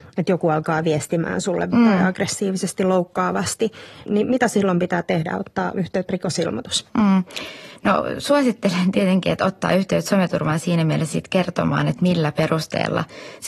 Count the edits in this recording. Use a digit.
4